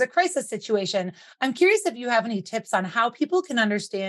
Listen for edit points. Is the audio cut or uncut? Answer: uncut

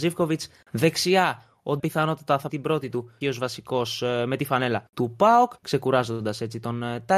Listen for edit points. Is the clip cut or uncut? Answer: cut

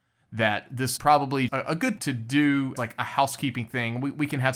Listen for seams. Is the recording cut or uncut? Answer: cut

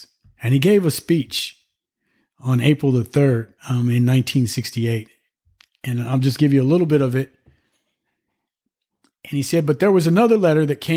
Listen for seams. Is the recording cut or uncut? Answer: cut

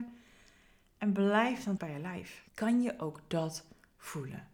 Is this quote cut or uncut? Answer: cut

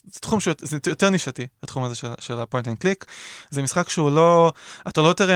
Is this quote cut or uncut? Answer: uncut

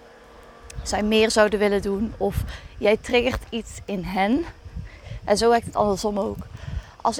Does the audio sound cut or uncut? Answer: uncut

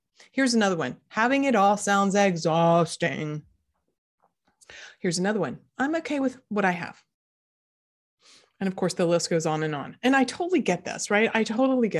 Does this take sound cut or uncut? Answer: uncut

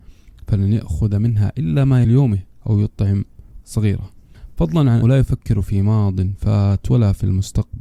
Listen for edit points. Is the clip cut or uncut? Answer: cut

